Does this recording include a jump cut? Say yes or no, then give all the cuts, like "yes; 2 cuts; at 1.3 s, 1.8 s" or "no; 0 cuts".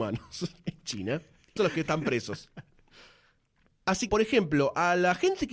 yes; 2 cuts; at 1.6 s, 4.1 s